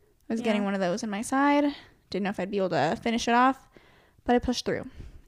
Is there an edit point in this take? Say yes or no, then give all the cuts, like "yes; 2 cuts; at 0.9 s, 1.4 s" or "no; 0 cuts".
no; 0 cuts